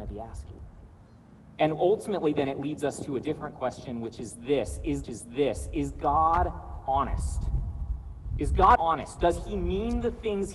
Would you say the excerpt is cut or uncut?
cut